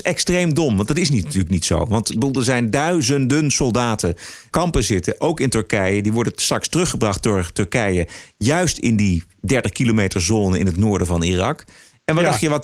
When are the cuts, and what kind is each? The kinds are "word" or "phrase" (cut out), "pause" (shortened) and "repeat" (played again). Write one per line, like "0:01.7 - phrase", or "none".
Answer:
0:04.5 - phrase